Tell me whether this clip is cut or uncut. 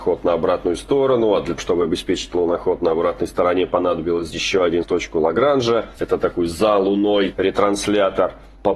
cut